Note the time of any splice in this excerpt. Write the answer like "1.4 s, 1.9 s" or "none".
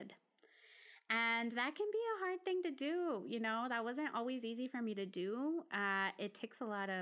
none